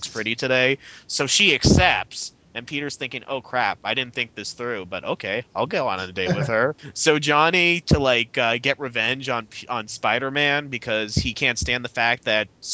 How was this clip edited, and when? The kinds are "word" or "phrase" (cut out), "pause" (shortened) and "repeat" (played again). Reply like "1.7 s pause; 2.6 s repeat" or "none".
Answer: none

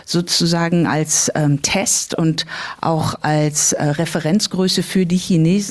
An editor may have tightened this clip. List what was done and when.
none

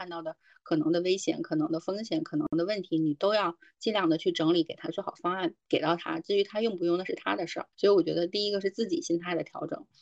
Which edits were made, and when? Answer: 5.6 s pause; 7.7 s pause

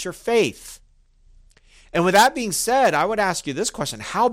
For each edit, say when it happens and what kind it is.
none

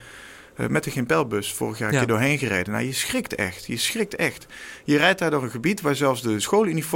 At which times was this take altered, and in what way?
none

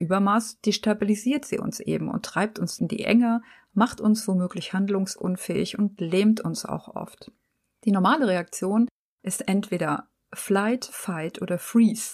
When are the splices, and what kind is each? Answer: none

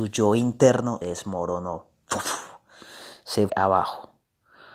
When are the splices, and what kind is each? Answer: 1.0 s word; 3.5 s word

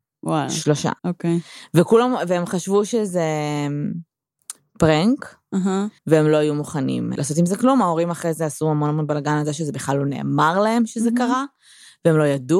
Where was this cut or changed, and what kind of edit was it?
1.0 s pause; 6.0 s pause; 7.1 s word

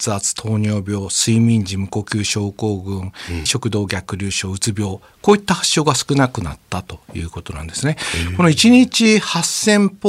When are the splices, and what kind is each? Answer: 3.5 s word

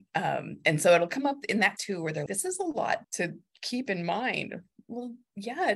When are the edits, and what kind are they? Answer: 1.8 s word; 2.3 s word; 3.0 s word

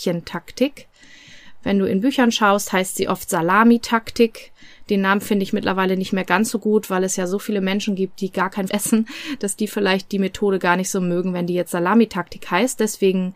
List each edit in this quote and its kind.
8.7 s word

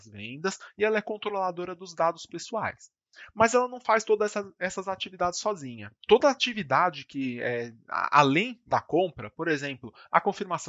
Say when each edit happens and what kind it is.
none

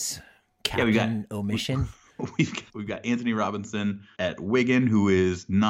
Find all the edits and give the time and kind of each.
2.7 s word; 4.2 s word

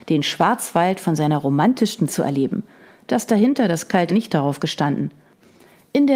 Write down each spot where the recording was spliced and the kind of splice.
2.1 s word; 4.1 s phrase

